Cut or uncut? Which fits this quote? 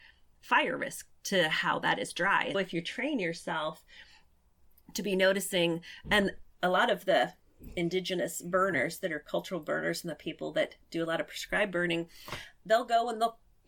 cut